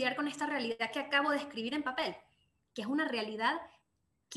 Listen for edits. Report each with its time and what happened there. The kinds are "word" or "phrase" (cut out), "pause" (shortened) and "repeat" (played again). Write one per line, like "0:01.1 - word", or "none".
none